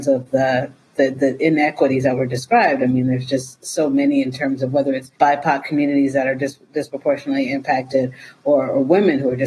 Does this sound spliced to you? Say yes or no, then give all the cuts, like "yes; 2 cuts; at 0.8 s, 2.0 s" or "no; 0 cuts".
yes; 1 cut; at 5.1 s